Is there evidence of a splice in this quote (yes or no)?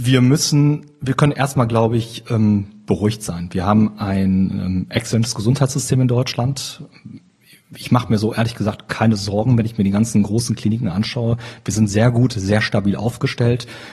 no